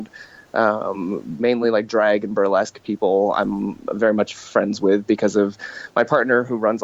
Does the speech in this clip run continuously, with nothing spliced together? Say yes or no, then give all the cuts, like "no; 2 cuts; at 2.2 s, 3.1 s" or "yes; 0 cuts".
yes; 0 cuts